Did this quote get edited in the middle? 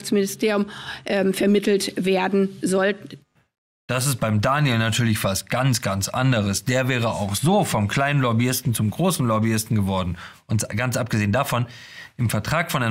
no; 0 cuts

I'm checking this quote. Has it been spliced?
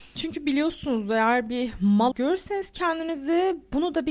yes; 1 cut; at 2.1 s

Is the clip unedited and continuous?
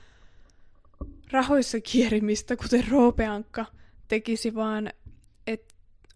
yes; 0 cuts

